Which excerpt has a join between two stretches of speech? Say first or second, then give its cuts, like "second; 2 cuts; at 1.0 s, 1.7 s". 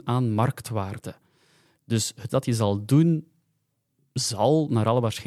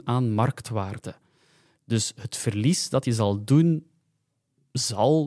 first; 1 cut; at 2.3 s